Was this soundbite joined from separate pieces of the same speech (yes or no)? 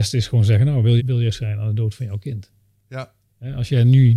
yes